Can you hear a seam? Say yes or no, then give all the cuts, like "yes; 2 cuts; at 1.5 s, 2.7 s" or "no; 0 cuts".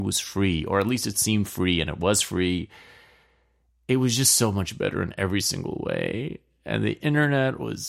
no; 0 cuts